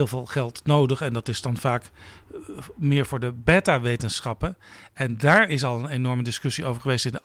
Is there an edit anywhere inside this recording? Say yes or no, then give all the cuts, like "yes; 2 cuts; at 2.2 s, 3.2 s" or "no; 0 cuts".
no; 0 cuts